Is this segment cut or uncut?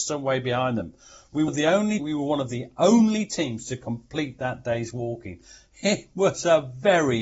cut